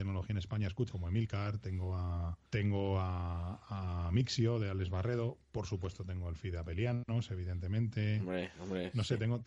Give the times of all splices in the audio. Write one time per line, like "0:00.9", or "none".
0:00.9
0:02.5